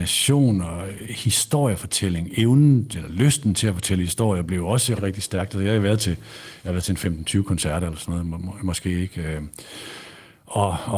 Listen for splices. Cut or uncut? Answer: cut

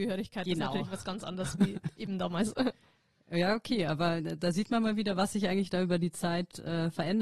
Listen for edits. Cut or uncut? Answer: uncut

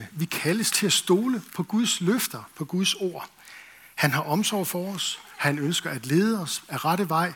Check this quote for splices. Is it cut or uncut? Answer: uncut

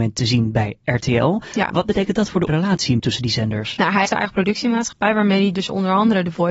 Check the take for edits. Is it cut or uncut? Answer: cut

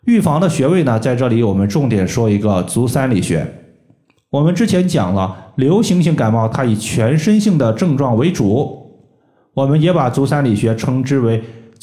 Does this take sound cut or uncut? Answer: uncut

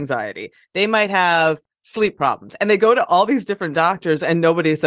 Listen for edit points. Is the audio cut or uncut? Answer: uncut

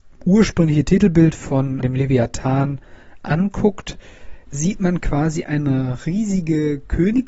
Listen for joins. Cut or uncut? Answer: cut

